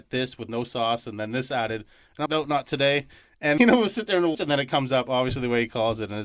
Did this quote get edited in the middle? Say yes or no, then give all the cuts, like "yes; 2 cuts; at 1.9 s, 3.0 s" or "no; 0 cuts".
yes; 3 cuts; at 2.3 s, 3.6 s, 4.3 s